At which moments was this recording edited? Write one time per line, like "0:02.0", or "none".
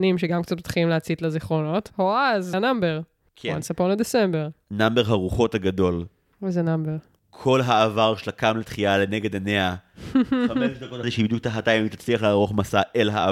0:01.9
0:02.5
0:11.0